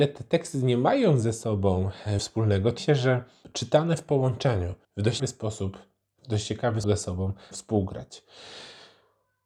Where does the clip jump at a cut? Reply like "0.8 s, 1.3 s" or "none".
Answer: 2.2 s, 2.8 s, 3.4 s, 4.8 s, 5.2 s, 6.2 s, 6.8 s, 7.5 s